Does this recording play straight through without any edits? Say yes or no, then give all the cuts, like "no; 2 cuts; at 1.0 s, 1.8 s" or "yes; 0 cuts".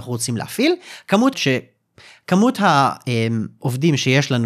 no; 1 cut; at 1.3 s